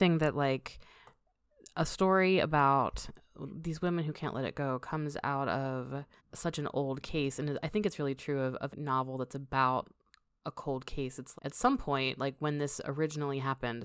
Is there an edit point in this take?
yes; 3 cuts; at 6.2 s, 8.7 s, 11.3 s

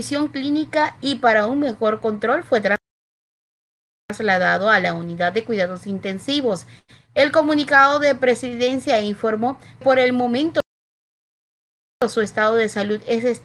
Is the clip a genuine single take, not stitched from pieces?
no; 1 cut; at 9.8 s

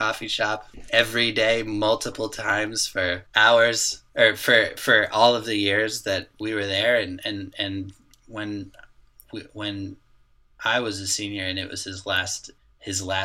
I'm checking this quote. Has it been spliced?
yes; 1 cut; at 4.1 s

